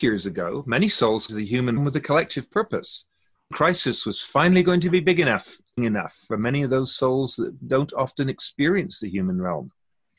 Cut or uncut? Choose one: cut